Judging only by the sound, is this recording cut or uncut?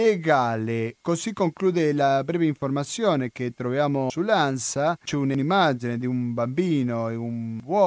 uncut